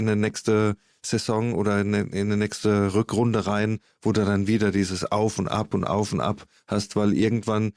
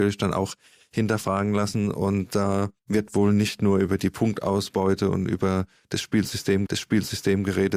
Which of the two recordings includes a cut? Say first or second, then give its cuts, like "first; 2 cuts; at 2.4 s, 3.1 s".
second; 2 cuts; at 2.8 s, 6.7 s